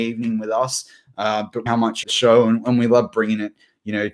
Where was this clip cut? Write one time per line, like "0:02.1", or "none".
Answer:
0:01.7
0:02.0

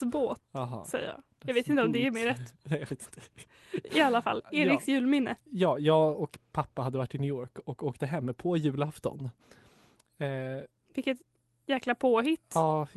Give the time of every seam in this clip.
none

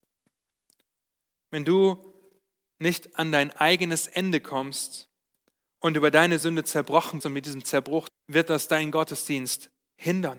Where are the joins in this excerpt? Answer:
0:07.2
0:08.1

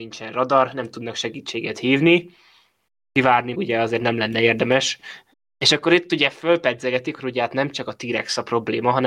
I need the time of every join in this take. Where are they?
0:03.5
0:05.3
0:07.2

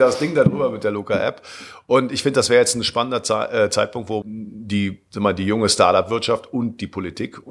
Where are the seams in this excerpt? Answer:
0:04.2

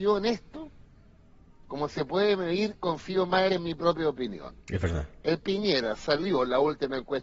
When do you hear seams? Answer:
0:03.5
0:04.6
0:05.4

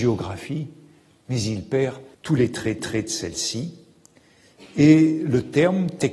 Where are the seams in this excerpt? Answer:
0:02.1
0:02.8

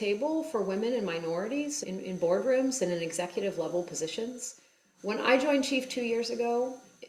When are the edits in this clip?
none

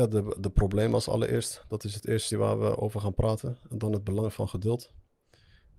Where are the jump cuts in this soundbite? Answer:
0:02.3

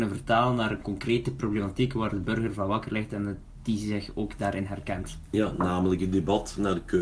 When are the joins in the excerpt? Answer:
none

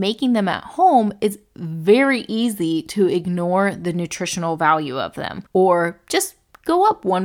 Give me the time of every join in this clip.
0:05.5

